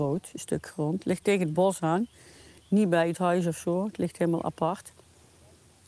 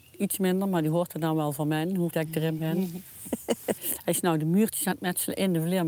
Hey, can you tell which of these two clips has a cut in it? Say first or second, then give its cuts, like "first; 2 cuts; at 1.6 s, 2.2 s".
second; 2 cuts; at 2.1 s, 3.8 s